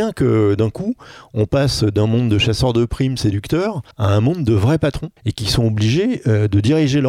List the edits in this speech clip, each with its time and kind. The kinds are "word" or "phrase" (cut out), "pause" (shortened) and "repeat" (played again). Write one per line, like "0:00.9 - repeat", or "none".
0:03.9 - pause
0:05.2 - pause